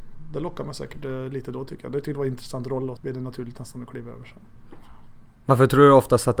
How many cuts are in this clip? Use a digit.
1